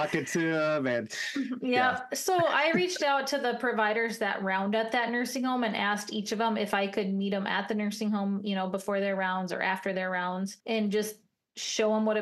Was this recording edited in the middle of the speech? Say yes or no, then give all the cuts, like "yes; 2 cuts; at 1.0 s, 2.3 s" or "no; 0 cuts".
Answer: yes; 1 cut; at 10.6 s